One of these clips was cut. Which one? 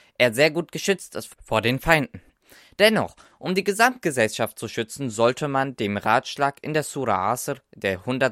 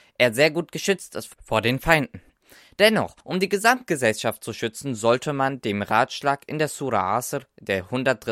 second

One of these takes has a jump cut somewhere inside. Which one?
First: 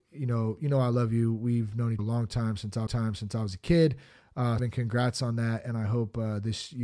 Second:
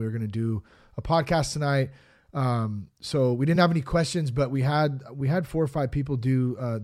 first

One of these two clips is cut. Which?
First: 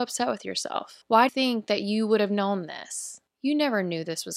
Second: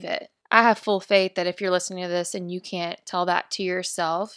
first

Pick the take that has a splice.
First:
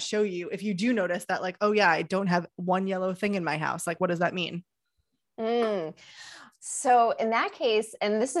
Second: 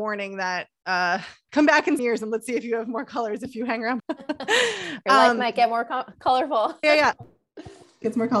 second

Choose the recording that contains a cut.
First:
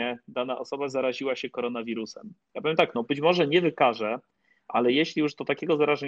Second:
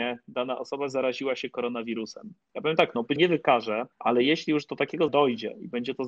second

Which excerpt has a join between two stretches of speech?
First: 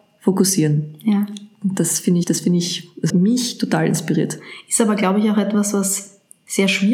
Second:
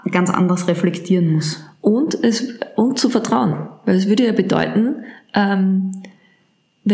first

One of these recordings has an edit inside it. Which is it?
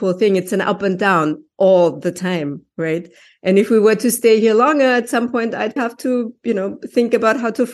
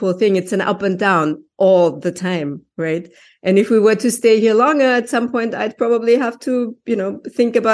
first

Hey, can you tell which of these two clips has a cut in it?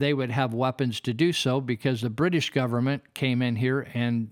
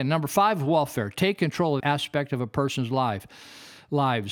second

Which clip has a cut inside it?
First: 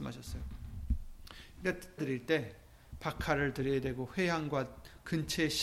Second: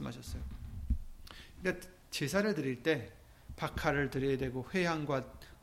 first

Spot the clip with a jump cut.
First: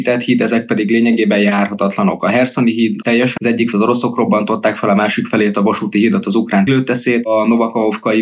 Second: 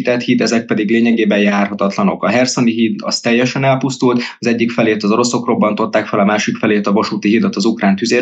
first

